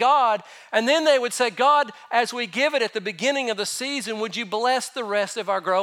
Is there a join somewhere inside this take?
no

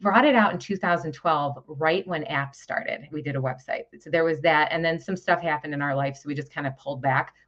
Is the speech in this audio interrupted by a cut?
no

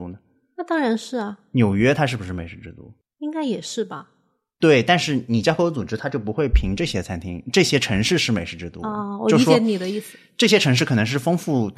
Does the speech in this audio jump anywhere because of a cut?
no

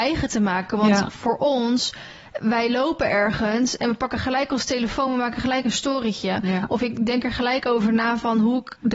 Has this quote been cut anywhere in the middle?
no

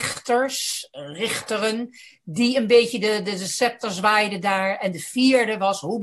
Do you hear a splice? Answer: no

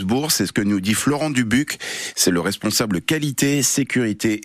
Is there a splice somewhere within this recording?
no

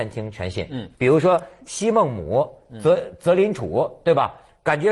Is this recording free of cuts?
no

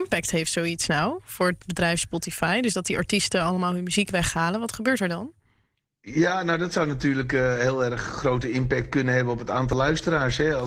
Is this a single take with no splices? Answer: yes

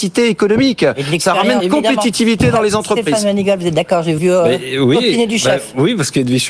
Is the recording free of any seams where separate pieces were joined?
no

